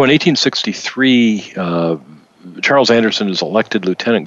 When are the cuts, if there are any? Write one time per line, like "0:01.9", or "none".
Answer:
none